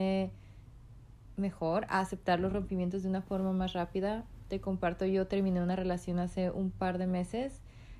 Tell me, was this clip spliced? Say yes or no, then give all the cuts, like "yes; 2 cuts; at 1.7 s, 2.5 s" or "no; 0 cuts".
no; 0 cuts